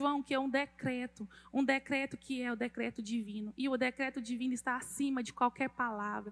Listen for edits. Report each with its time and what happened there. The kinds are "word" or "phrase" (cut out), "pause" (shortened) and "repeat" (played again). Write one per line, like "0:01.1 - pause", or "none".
none